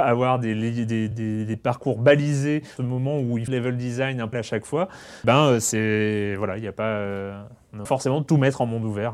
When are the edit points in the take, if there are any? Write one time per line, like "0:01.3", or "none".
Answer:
0:01.1
0:02.8
0:03.5
0:04.3
0:05.2
0:07.9

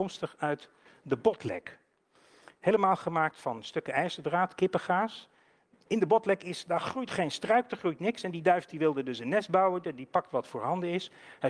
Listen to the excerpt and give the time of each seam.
none

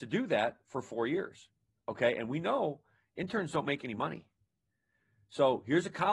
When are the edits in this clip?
0:01.8

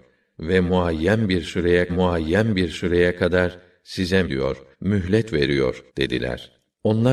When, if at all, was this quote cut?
0:01.9
0:04.2
0:04.7
0:05.9

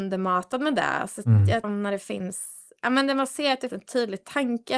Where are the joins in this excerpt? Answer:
0:01.6
0:03.7

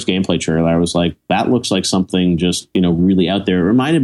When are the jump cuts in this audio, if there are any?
none

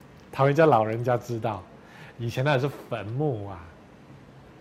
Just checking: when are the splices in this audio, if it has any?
none

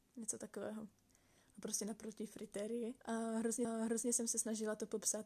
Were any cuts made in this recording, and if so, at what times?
0:03.0
0:03.6

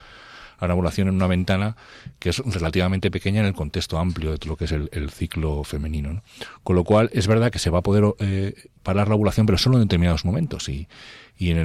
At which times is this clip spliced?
0:08.8

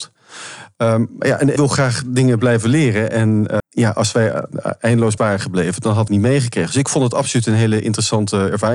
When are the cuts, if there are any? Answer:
0:01.6
0:03.6
0:05.2
0:06.1

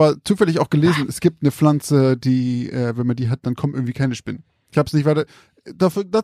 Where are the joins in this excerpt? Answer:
none

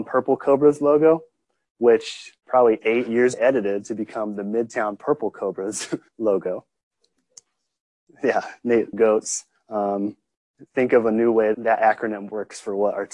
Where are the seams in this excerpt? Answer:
0:02.4
0:03.3
0:06.1
0:08.9
0:10.7
0:11.5

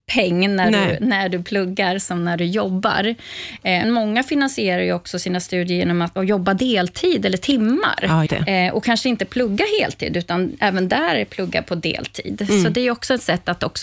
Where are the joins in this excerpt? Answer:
0:03.8
0:06.2
0:08.3

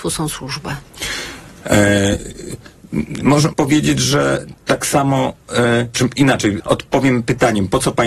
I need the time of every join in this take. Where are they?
0:03.5
0:04.5
0:05.9
0:06.6

